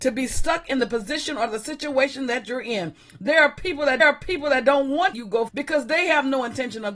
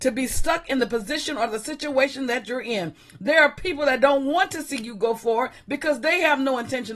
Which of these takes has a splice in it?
first; 3 cuts; at 4.0 s, 5.1 s, 5.5 s

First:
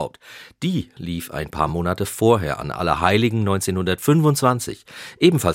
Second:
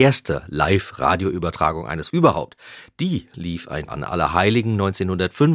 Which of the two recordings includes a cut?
second; 2 cuts; at 2.1 s, 3.9 s

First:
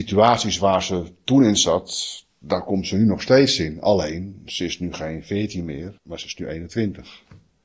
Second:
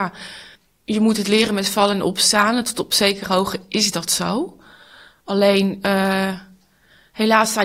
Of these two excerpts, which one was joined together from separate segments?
first; 1 cut; at 6.0 s

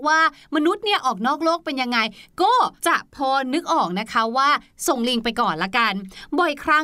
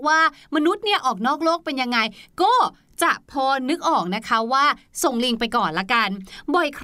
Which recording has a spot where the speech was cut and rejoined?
first; 1 cut; at 2.8 s

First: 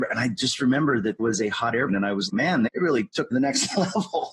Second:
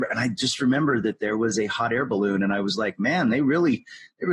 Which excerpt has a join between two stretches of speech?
first; 5 cuts; at 1.2 s, 1.9 s, 2.3 s, 2.7 s, 3.3 s

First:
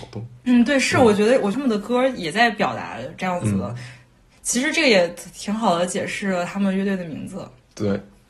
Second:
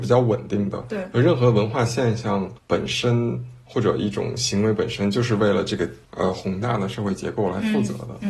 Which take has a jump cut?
second; 1 cut; at 2.6 s

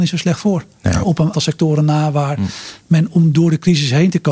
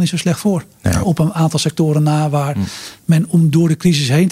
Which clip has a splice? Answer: first; 1 cut; at 1.3 s

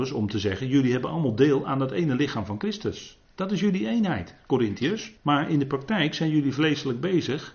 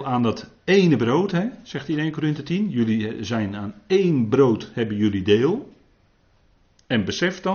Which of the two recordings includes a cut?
first; 2 cuts; at 3.2 s, 5.2 s

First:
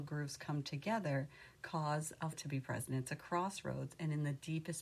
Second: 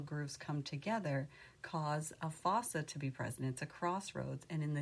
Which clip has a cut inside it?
first; 1 cut; at 2.3 s

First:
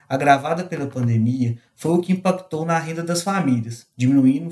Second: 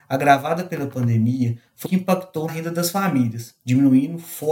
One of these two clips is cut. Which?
second; 2 cuts; at 1.8 s, 2.5 s

